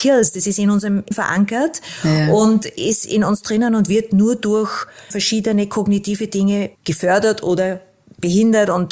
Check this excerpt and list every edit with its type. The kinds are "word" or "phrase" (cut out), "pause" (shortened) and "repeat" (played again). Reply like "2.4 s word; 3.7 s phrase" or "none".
1.1 s word; 5.1 s word; 6.7 s pause